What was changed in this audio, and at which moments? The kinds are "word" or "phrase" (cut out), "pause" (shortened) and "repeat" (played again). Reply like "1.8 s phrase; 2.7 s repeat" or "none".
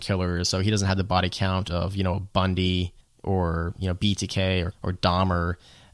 3.0 s pause; 4.7 s word